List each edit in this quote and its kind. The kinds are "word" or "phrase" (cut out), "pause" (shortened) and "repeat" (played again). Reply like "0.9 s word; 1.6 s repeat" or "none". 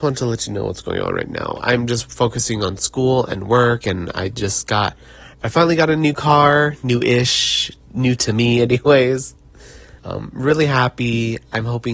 5.3 s pause; 10.0 s pause